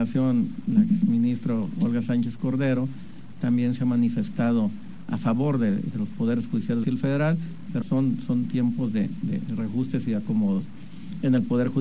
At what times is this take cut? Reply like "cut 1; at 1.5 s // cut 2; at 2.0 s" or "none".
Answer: cut 1; at 6.8 s // cut 2; at 7.8 s